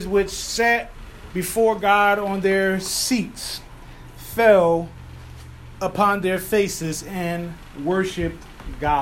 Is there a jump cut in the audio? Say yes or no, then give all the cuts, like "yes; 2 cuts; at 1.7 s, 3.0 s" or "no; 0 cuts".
no; 0 cuts